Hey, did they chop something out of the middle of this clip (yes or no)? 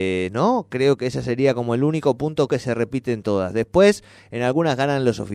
yes